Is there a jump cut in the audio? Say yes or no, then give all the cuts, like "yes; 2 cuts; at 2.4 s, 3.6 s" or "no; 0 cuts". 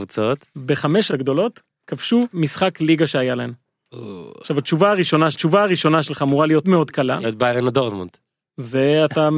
yes; 6 cuts; at 1.1 s, 2.3 s, 5.3 s, 6.6 s, 7.2 s, 8.3 s